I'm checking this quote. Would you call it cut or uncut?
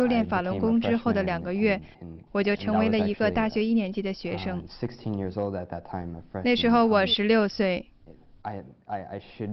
cut